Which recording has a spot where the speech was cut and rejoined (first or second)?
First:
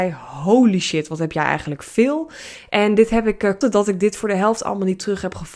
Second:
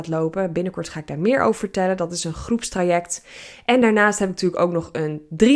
first